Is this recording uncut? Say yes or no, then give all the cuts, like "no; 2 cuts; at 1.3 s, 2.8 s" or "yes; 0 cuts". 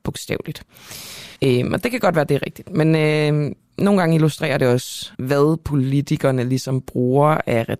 no; 2 cuts; at 1.4 s, 5.1 s